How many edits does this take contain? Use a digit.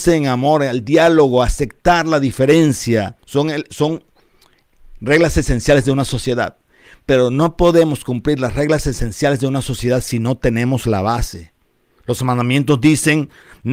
1